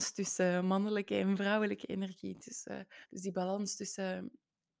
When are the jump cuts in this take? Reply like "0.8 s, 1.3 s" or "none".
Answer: 3.0 s